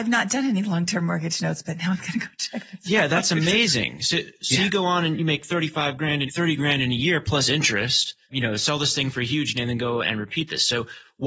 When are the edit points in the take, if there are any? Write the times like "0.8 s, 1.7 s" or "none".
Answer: 6.2 s, 8.2 s, 9.6 s